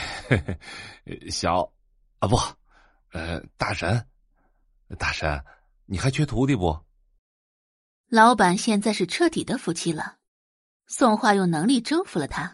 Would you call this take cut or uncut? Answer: uncut